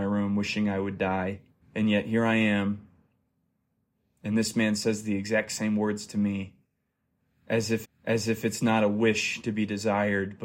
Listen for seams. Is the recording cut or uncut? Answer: cut